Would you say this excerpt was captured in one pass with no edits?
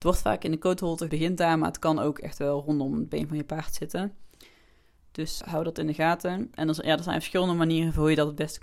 no; 2 cuts; at 1.1 s, 5.4 s

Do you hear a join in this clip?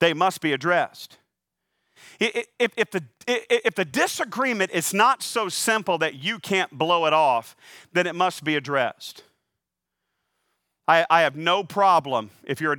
no; 0 cuts

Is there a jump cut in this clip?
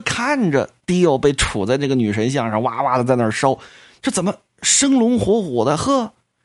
no; 0 cuts

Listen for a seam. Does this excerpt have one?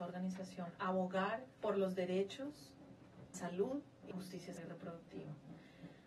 yes; 4 cuts; at 1.6 s, 3.3 s, 4.1 s, 4.6 s

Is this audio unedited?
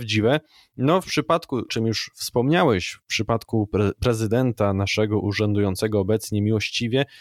no; 1 cut; at 1.7 s

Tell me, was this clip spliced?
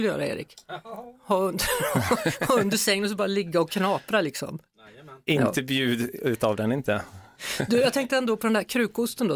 no; 0 cuts

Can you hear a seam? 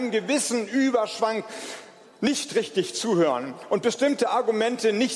no; 0 cuts

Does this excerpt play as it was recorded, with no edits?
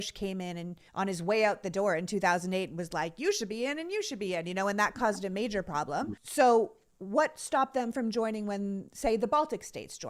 yes; 0 cuts

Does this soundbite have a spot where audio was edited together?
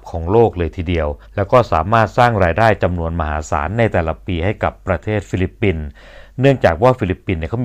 yes; 1 cut; at 1.2 s

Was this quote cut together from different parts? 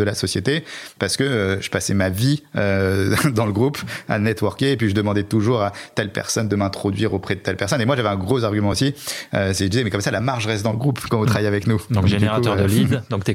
no; 0 cuts

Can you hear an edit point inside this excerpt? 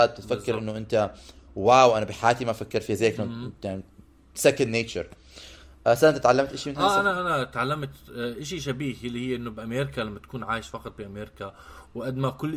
no; 0 cuts

